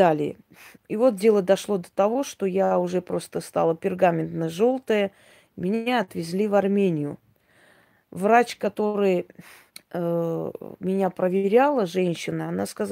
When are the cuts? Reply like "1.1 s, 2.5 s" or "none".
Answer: 9.7 s